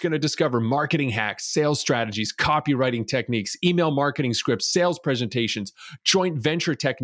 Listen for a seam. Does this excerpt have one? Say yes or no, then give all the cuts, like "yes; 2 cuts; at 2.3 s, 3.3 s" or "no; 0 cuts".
no; 0 cuts